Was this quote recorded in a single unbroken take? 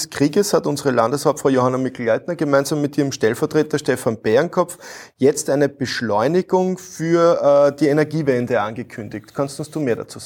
yes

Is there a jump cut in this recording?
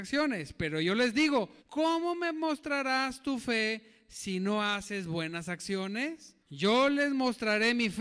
yes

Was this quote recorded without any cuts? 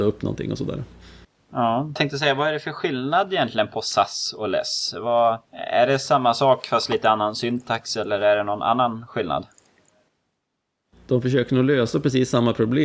no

